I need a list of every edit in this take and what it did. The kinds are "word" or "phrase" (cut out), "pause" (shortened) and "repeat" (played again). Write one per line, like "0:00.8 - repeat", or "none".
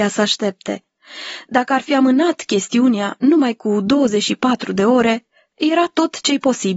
none